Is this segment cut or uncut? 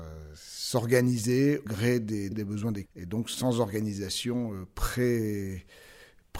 cut